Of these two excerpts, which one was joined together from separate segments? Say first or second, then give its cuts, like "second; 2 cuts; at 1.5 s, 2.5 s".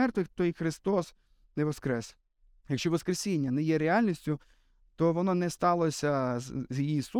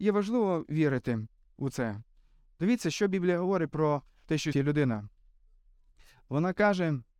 second; 1 cut; at 4.5 s